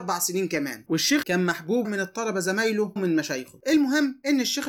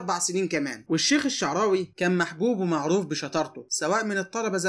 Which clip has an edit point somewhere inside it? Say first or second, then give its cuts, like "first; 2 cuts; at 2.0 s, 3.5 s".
first; 3 cuts; at 1.2 s, 1.8 s, 3.0 s